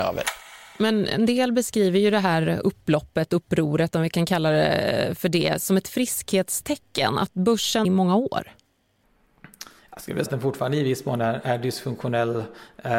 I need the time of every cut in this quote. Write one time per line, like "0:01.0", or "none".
0:07.8
0:09.8
0:10.3